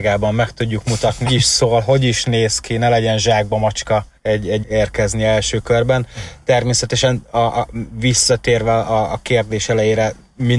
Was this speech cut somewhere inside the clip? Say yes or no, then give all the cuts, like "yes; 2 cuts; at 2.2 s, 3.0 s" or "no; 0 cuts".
yes; 3 cuts; at 1.3 s, 4.2 s, 4.6 s